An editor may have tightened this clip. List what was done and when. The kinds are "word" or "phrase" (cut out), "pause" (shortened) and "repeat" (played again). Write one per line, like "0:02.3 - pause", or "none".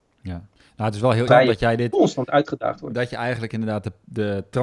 0:01.3 - word